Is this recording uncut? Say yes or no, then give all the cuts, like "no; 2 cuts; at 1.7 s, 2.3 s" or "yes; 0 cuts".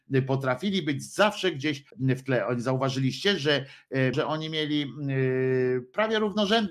no; 2 cuts; at 1.9 s, 4.1 s